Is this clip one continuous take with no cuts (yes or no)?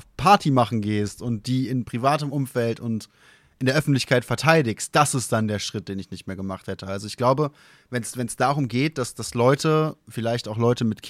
yes